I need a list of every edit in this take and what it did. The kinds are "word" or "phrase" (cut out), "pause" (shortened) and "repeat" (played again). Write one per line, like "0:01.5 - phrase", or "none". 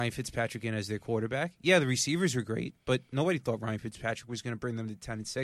none